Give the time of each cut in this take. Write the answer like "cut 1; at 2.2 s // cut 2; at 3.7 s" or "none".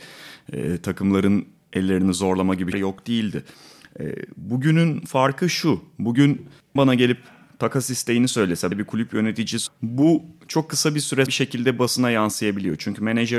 cut 1; at 2.7 s // cut 2; at 6.8 s // cut 3; at 8.7 s // cut 4; at 9.7 s // cut 5; at 11.3 s